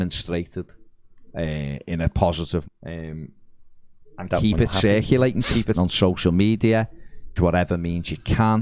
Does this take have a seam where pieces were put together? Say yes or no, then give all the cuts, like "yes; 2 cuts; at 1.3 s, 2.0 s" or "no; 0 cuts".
yes; 3 cuts; at 2.6 s, 5.7 s, 7.4 s